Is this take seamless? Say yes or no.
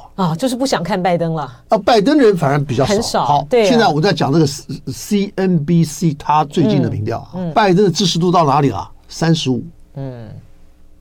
no